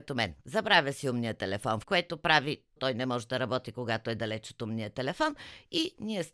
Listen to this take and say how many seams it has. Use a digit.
2